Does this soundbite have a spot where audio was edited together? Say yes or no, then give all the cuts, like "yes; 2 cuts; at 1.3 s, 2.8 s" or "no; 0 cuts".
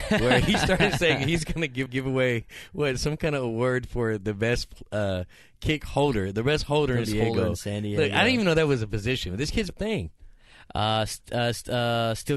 yes; 3 cuts; at 1.9 s, 7.1 s, 9.7 s